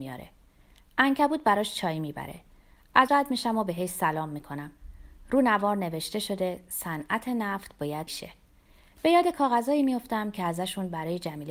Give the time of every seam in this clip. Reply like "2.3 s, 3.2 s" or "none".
3.1 s, 8.1 s